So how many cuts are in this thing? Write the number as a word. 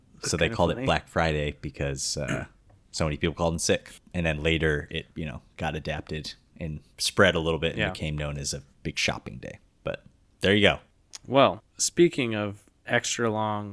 four